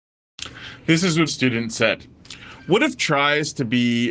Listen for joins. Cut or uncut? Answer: cut